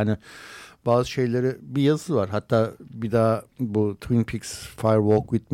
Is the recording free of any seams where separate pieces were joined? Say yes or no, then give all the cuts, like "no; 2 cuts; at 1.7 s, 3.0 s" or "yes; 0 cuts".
yes; 0 cuts